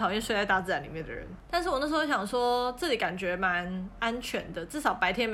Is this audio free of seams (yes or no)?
no